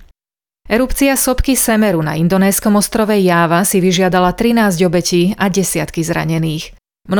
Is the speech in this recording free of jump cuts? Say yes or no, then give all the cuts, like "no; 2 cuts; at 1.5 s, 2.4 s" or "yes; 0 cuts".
yes; 0 cuts